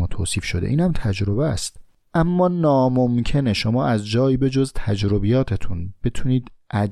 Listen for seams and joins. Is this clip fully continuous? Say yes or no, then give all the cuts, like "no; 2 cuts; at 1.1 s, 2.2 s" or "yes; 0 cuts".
yes; 0 cuts